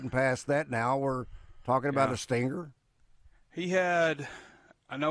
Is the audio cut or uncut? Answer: uncut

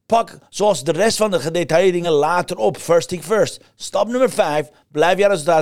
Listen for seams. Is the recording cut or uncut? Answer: uncut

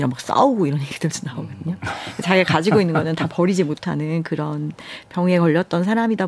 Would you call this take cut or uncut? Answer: uncut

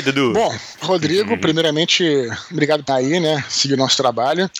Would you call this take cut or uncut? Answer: cut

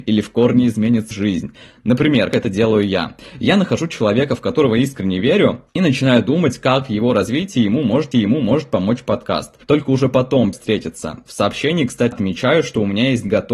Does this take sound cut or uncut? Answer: cut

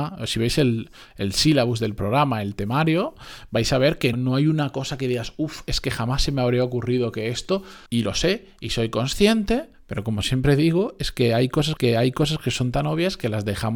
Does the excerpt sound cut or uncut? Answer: cut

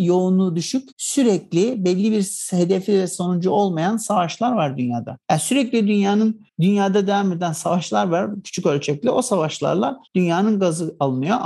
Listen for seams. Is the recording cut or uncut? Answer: cut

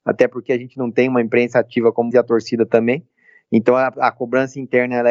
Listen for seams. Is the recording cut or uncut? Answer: cut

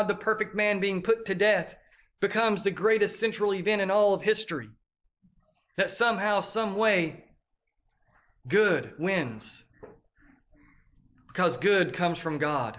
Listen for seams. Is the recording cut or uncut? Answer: uncut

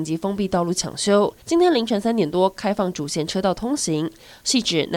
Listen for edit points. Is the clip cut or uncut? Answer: cut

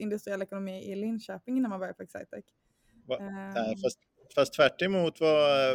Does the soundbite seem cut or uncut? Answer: uncut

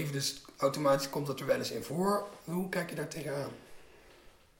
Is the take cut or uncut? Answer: uncut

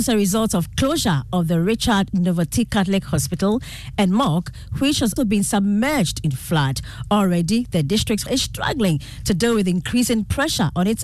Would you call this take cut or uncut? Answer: cut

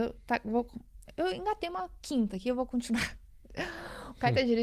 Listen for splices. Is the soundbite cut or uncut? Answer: uncut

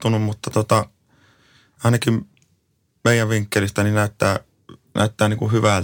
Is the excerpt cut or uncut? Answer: uncut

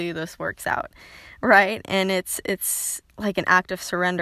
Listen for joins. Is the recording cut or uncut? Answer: cut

